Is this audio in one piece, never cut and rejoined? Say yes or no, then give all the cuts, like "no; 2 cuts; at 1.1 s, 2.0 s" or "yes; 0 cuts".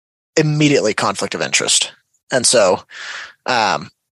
yes; 0 cuts